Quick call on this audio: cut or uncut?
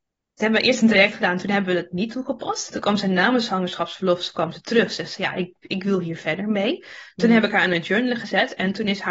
uncut